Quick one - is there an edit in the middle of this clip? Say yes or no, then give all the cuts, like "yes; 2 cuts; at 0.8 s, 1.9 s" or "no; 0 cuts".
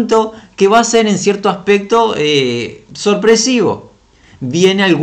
no; 0 cuts